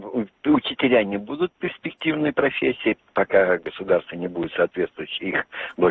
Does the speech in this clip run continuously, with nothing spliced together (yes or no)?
yes